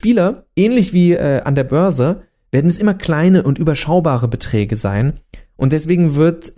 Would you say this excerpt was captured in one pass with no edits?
yes; 0 cuts

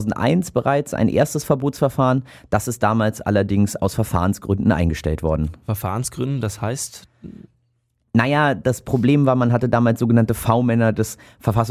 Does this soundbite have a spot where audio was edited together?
no; 0 cuts

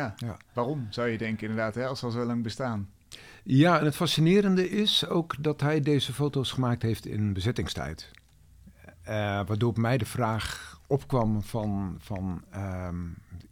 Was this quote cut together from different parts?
yes; 1 cut; at 10.8 s

